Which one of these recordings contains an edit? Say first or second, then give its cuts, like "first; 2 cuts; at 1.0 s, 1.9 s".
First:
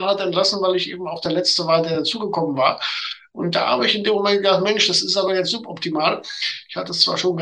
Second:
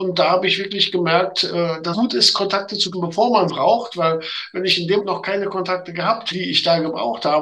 second; 5 cuts; at 1.9 s, 2.9 s, 3.5 s, 5.0 s, 6.3 s